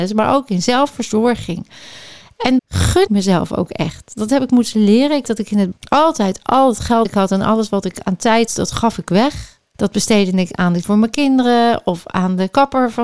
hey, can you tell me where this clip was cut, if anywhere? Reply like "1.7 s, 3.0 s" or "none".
2.6 s, 3.1 s, 5.2 s, 5.7 s, 7.0 s, 8.5 s, 10.8 s